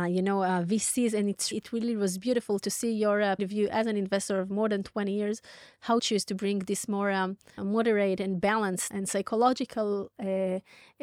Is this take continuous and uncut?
no; 5 cuts; at 1.5 s, 3.4 s, 6.0 s, 7.6 s, 8.9 s

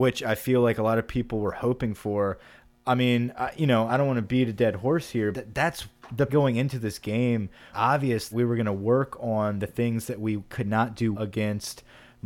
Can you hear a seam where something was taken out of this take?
yes; 6 cuts; at 3.9 s, 5.3 s, 6.3 s, 7.7 s, 8.3 s, 11.1 s

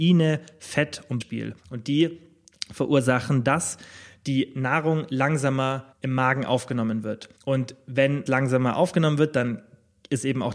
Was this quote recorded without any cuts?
no; 5 cuts; at 1.2 s, 1.6 s, 5.9 s, 7.4 s, 8.3 s

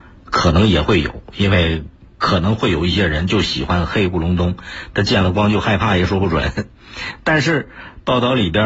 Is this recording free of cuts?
yes; 0 cuts

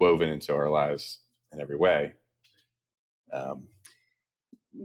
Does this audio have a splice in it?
no; 0 cuts

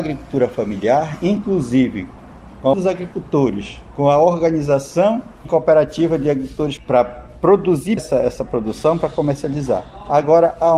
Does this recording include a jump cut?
yes; 4 cuts; at 2.7 s, 5.4 s, 6.8 s, 8.0 s

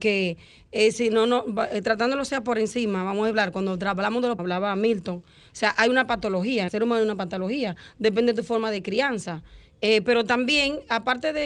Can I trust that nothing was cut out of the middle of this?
no; 2 cuts; at 4.4 s, 6.7 s

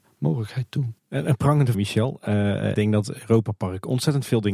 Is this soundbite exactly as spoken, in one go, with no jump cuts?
no; 3 cuts; at 1.0 s, 1.7 s, 2.7 s

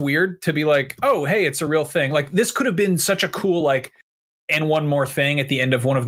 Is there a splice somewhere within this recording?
no; 0 cuts

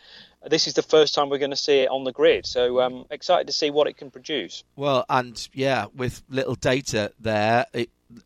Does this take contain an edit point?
no; 0 cuts

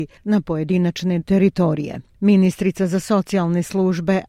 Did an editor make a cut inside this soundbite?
yes; 1 cut; at 1.2 s

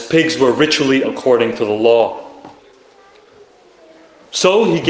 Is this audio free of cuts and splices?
no; 1 cut; at 1.0 s

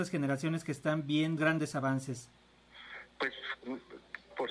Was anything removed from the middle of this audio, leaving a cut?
yes; 1 cut; at 1.4 s

